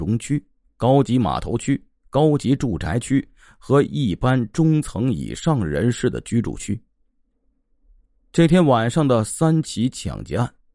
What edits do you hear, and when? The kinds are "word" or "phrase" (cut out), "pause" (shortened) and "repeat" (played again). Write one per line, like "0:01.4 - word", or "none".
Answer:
none